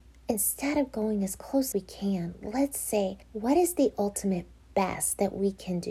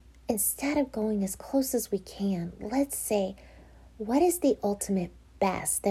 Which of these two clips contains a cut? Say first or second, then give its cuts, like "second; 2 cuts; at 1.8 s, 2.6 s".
first; 2 cuts; at 1.7 s, 3.2 s